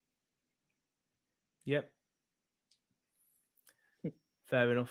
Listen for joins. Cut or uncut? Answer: uncut